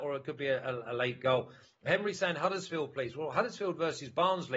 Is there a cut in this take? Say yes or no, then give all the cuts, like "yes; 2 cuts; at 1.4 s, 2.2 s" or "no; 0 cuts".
no; 0 cuts